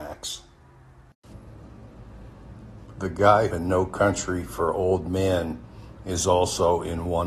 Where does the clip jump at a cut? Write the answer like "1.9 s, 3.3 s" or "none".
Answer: 3.5 s